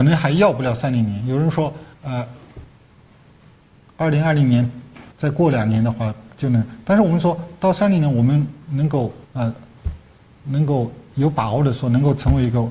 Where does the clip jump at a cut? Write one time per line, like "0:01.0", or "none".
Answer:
0:01.9
0:05.1
0:09.2